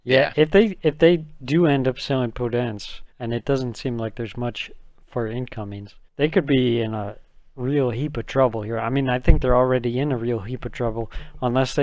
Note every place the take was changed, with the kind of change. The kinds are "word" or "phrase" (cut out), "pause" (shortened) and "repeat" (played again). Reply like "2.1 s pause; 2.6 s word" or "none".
3.1 s pause; 6.1 s pause